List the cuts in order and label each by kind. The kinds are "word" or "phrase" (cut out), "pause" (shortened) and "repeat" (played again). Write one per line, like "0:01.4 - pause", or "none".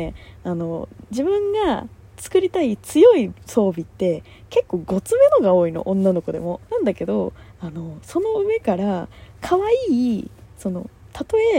0:06.7 - pause